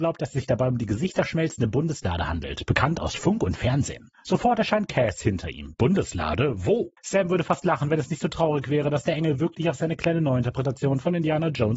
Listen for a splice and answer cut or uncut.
uncut